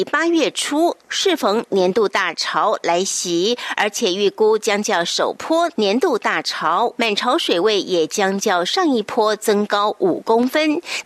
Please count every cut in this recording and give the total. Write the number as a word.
one